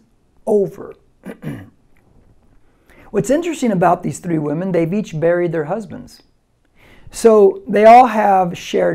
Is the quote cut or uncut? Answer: uncut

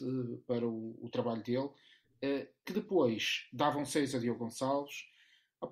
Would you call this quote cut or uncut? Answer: uncut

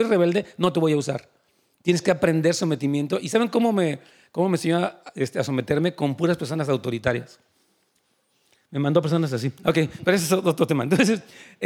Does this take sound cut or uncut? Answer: uncut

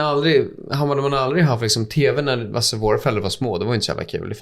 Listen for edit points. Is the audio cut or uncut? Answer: uncut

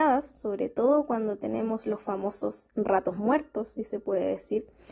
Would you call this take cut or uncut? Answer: uncut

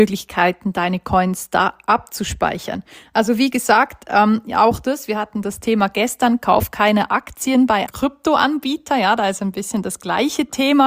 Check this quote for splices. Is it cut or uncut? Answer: cut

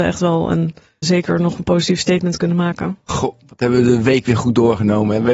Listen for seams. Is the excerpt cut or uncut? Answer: cut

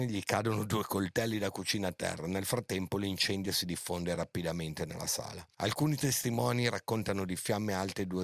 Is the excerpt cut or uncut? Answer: uncut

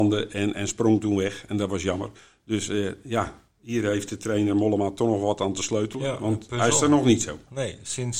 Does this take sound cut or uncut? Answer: uncut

